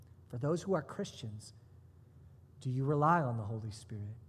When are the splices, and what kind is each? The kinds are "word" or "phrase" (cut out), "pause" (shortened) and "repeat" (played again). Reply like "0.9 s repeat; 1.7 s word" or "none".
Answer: none